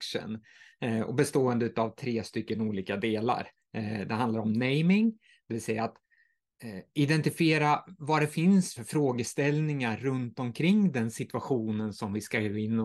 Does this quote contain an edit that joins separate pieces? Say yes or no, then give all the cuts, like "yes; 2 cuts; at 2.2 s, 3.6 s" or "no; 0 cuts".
yes; 1 cut; at 8.8 s